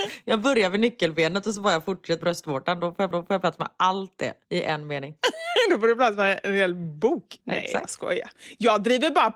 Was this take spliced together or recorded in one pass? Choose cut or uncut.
cut